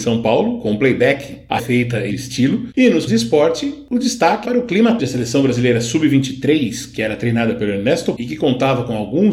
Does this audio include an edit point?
yes; 6 cuts; at 1.6 s, 2.1 s, 3.1 s, 4.4 s, 5.0 s, 8.2 s

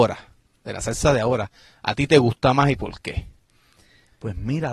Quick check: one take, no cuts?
yes; 0 cuts

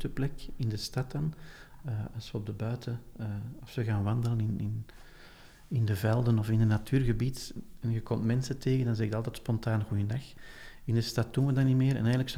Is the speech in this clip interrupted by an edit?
no; 0 cuts

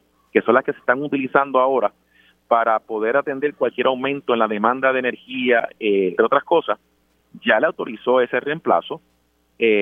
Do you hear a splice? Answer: yes; 1 cut; at 6.2 s

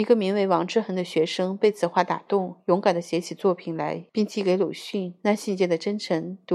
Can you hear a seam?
yes; 1 cut; at 4.1 s

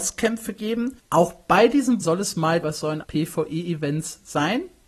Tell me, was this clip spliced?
yes; 4 cuts; at 1.0 s, 2.0 s, 2.6 s, 3.0 s

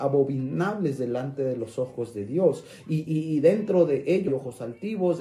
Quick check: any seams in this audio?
yes; 2 cuts; at 3.1 s, 4.3 s

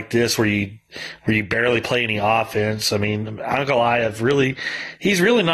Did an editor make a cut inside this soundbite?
no; 0 cuts

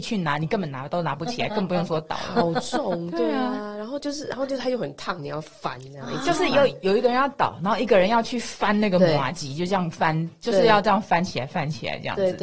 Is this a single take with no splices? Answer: yes; 0 cuts

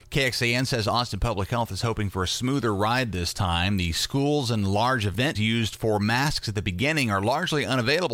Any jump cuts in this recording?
yes; 2 cuts; at 5.3 s, 6.4 s

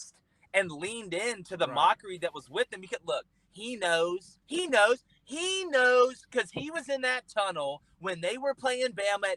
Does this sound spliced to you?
yes; 1 cut; at 4.4 s

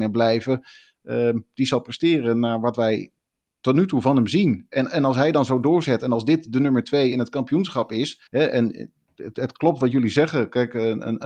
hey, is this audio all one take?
no; 1 cut; at 8.3 s

